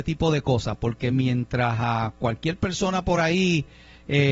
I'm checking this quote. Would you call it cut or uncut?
uncut